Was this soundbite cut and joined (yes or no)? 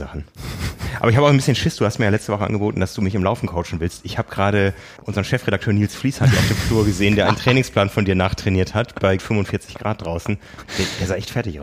yes